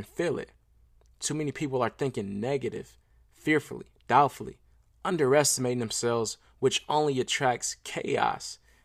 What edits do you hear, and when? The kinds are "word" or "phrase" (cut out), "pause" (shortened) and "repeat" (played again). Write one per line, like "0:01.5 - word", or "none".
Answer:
none